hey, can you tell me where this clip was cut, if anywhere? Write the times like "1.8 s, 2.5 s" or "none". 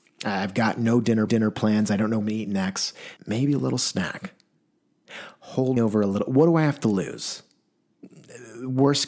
1.3 s, 2.2 s, 3.2 s, 5.8 s